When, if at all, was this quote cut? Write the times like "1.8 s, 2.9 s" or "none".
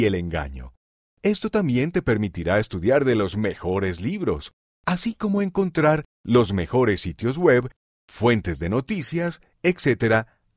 none